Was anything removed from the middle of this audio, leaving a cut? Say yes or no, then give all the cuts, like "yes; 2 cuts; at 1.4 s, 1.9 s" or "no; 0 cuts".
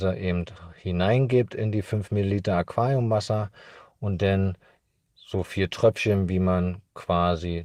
no; 0 cuts